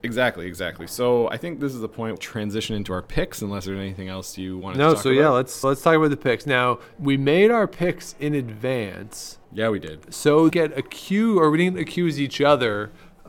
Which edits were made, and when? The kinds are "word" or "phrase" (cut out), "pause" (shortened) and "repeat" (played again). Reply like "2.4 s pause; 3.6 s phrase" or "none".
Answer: 2.2 s phrase; 5.6 s word; 6.9 s pause; 9.4 s pause; 10.5 s phrase